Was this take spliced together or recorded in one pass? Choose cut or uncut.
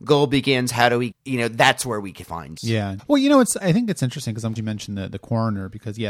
cut